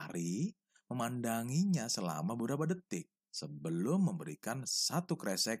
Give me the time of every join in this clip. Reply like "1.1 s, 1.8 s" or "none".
3.2 s